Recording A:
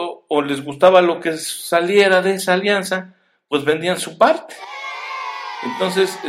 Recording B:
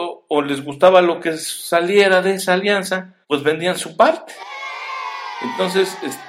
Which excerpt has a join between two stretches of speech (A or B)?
B